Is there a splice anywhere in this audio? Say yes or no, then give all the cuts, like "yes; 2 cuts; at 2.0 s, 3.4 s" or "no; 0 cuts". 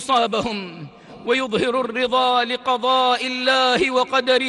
no; 0 cuts